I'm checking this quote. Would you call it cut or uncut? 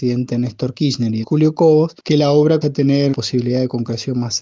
cut